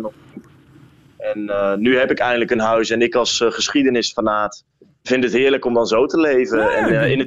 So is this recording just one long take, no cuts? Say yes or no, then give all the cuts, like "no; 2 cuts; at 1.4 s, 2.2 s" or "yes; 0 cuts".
yes; 0 cuts